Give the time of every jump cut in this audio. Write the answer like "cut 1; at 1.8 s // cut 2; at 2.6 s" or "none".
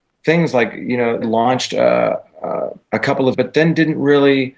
cut 1; at 1.2 s // cut 2; at 2.8 s // cut 3; at 3.3 s